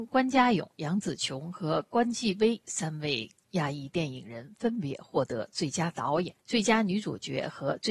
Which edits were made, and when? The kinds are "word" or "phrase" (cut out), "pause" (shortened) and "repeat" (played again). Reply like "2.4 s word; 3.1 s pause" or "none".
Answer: 6.4 s pause

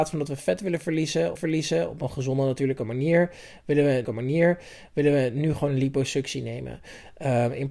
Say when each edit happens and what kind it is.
1.4 s repeat; 4.0 s repeat

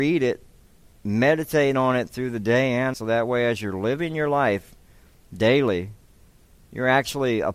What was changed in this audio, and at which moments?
2.9 s word

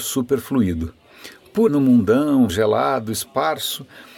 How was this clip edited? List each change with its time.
1.7 s word; 2.5 s word

